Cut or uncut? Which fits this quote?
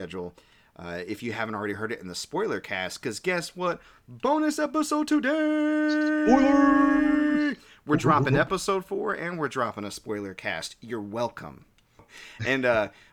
uncut